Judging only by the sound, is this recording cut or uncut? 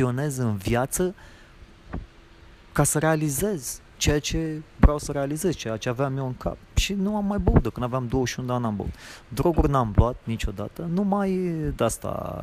uncut